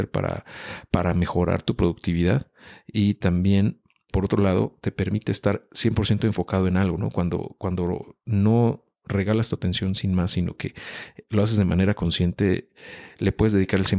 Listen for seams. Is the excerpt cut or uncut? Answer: cut